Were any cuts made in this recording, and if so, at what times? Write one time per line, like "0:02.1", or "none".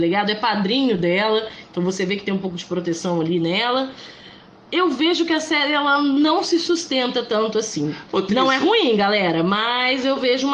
none